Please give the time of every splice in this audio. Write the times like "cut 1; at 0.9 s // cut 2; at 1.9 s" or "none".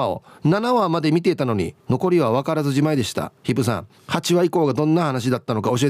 cut 1; at 1.8 s // cut 2; at 3.4 s // cut 3; at 4.0 s